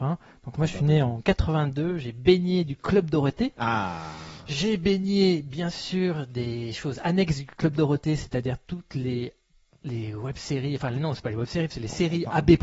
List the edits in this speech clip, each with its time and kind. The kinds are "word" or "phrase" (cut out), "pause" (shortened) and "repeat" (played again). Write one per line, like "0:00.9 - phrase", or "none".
none

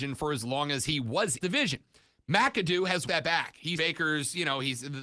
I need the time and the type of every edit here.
0:01.4 - phrase
0:03.1 - word
0:03.8 - word

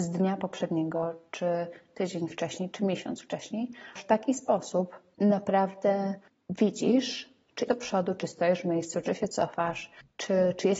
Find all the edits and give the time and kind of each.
0:04.0 - word
0:07.7 - word

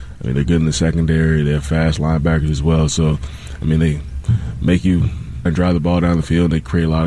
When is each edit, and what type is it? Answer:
0:05.5 - word

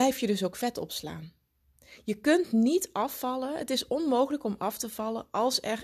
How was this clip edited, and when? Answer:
none

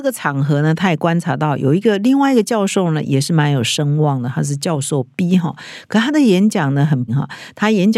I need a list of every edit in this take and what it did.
0:07.1 - word

